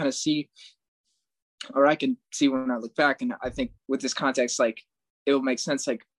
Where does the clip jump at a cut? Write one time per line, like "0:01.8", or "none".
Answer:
0:03.8